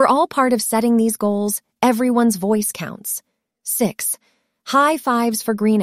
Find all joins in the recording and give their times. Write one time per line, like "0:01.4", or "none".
none

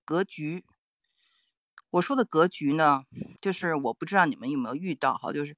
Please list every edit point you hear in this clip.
0:03.4

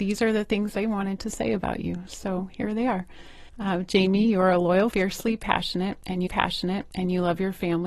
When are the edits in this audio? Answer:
0:03.5
0:04.9
0:06.3

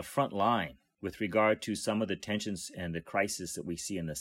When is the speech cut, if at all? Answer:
none

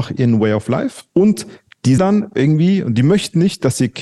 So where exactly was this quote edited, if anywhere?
0:01.1
0:02.0

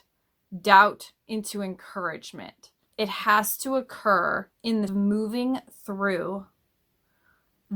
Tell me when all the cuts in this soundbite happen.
0:01.2
0:02.9
0:04.5
0:04.9

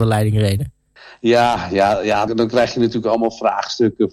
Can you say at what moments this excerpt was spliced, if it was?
0:01.0
0:02.3

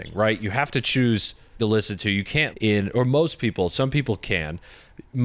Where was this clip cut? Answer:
0:01.6
0:02.5

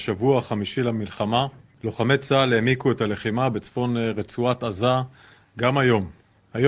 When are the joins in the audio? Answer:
none

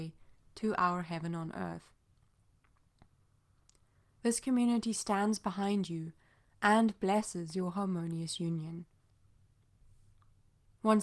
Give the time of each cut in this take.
none

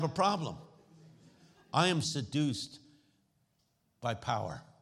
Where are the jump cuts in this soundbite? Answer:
0:02.0

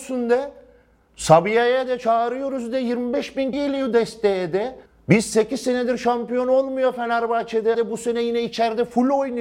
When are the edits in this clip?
0:03.5
0:04.9
0:07.7

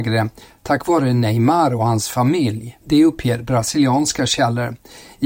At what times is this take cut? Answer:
0:02.8

